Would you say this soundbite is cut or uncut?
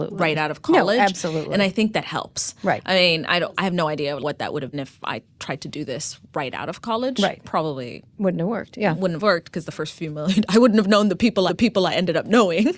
cut